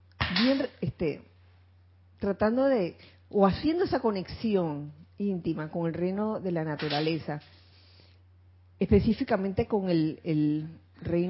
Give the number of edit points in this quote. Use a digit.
0